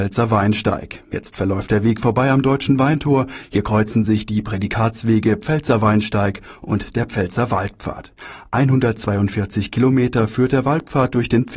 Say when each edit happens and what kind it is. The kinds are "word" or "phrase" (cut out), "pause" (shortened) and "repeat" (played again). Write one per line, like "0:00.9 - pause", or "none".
none